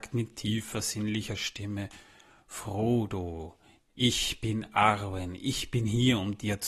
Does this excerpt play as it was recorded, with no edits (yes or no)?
yes